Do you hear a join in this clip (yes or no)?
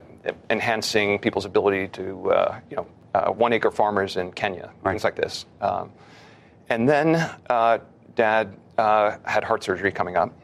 no